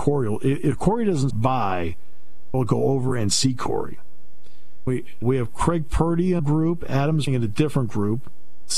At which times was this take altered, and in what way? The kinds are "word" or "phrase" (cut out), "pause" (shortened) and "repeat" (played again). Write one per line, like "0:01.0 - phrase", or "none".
0:01.3 - word
0:02.5 - word
0:04.9 - word
0:05.2 - word
0:06.4 - word
0:07.3 - word